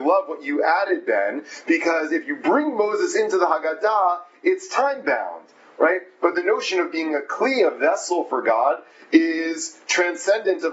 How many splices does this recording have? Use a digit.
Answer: 0